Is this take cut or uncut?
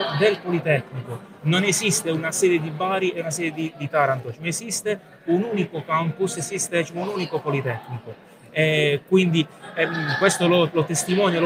uncut